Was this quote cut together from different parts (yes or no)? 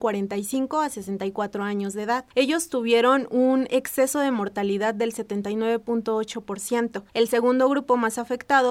yes